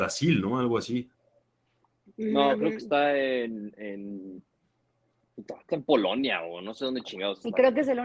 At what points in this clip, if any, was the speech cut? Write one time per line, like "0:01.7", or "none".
0:05.7